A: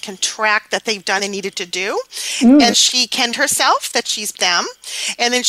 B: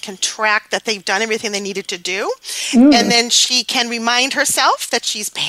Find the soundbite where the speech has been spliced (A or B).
A